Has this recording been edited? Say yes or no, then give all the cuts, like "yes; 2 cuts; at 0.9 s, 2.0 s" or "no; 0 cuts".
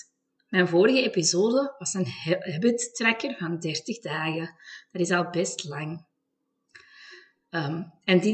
no; 0 cuts